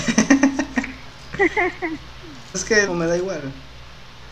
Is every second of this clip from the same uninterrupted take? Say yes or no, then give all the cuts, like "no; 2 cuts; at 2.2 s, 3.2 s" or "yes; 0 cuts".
no; 2 cuts; at 2.5 s, 2.9 s